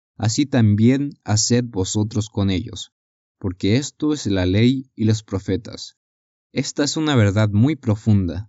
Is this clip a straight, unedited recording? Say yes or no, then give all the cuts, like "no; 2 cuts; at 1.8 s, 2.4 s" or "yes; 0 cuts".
yes; 0 cuts